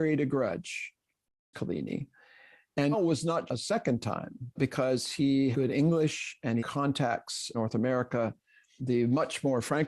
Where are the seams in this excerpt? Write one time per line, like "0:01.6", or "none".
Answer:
0:01.5
0:02.9
0:03.5
0:04.6
0:05.5
0:06.6
0:07.5
0:08.8

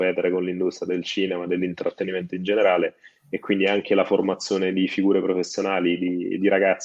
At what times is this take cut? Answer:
none

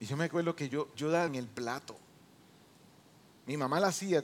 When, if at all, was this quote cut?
0:00.9
0:01.3

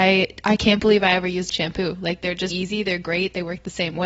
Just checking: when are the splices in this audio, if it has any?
0:01.5
0:02.5

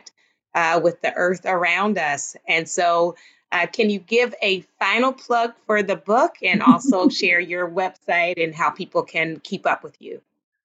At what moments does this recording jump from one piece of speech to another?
none

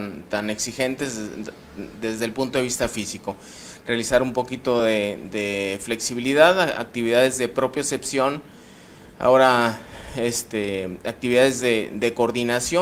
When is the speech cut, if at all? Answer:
none

